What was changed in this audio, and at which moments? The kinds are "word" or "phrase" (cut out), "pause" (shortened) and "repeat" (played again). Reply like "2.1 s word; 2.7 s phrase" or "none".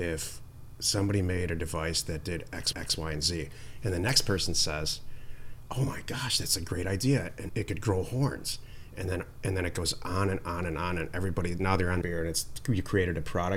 2.7 s repeat; 7.5 s word; 12.0 s phrase